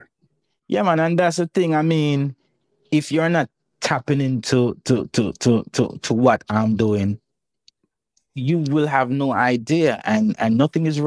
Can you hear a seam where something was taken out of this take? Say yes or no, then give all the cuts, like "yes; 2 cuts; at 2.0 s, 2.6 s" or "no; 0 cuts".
no; 0 cuts